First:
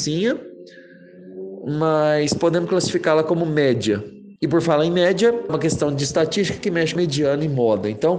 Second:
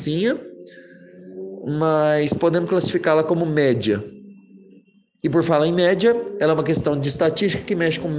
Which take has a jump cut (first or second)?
first